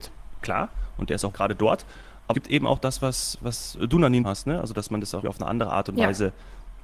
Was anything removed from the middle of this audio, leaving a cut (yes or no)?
yes